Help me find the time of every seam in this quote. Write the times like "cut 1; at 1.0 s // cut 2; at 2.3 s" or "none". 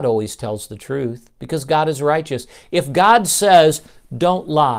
none